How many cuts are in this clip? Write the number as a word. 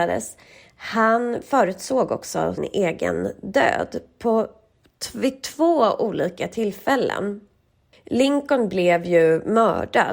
one